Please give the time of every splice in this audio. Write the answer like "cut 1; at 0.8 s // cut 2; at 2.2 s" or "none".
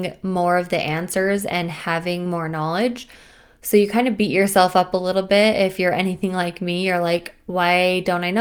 none